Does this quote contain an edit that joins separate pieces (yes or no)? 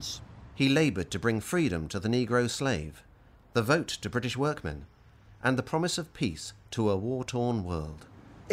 no